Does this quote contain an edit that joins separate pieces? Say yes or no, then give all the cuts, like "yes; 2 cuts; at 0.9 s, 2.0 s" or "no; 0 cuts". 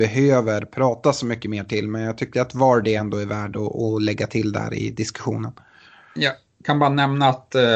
no; 0 cuts